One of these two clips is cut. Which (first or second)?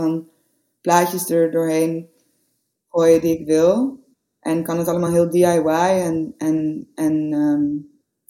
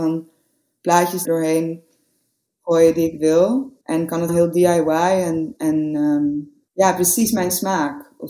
second